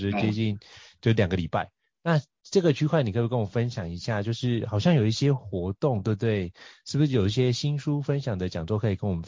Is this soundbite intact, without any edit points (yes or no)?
yes